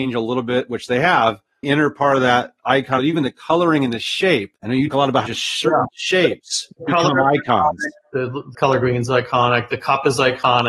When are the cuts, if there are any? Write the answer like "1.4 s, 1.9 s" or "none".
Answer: 1.6 s, 3.0 s, 4.6 s, 4.9 s, 5.3 s, 8.5 s